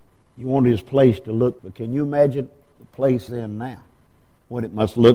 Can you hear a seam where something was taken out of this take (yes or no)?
yes